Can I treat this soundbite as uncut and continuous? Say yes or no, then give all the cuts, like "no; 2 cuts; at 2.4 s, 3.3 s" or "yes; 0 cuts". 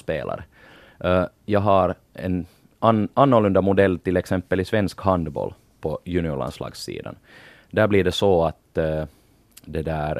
yes; 0 cuts